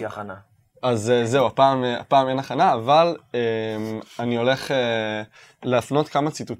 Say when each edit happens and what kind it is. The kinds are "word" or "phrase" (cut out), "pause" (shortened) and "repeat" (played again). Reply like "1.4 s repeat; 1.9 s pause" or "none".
none